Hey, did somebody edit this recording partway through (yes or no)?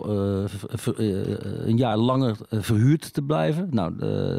no